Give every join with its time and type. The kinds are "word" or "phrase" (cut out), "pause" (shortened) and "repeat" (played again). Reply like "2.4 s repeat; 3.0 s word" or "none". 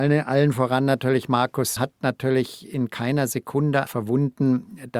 1.8 s word; 3.9 s word